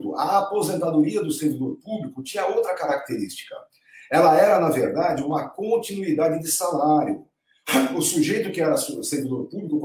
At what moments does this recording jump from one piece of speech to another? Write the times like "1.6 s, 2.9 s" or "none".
none